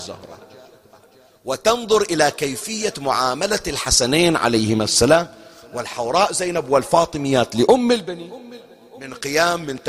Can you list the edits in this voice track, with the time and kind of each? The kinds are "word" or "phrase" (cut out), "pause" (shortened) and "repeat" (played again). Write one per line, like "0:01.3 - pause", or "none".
none